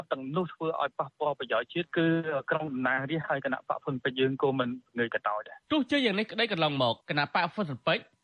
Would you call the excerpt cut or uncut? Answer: cut